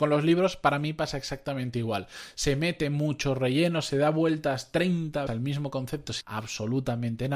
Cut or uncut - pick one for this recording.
cut